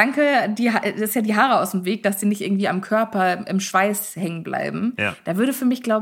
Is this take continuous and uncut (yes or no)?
yes